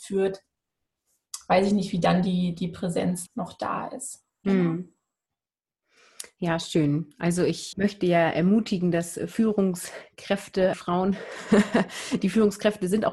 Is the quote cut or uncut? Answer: cut